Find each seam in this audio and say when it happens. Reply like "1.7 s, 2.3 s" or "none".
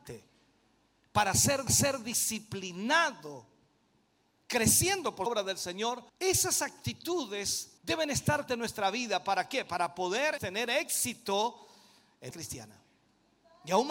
1.7 s, 5.3 s, 6.1 s, 7.8 s, 8.5 s, 10.4 s, 12.3 s